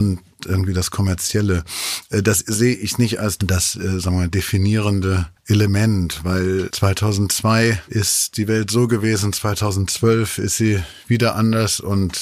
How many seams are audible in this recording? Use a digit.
1